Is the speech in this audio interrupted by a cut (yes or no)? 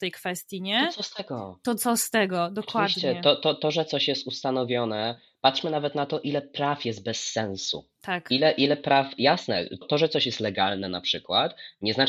yes